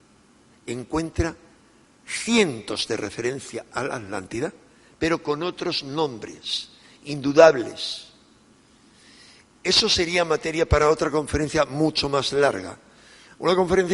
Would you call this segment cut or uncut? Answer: uncut